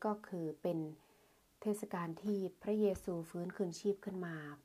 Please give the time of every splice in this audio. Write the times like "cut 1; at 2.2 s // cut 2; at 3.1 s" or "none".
none